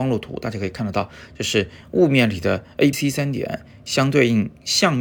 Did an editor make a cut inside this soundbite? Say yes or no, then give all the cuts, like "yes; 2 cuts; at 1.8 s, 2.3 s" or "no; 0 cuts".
yes; 1 cut; at 2.9 s